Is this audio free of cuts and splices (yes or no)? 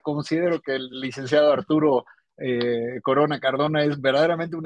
yes